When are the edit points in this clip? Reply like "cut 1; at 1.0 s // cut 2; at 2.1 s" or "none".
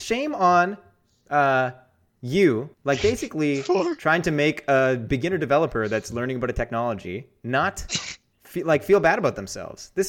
cut 1; at 2.7 s